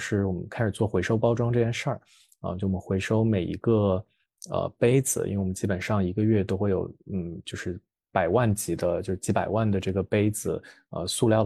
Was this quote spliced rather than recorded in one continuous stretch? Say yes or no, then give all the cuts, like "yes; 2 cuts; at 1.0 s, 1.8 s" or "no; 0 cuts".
no; 0 cuts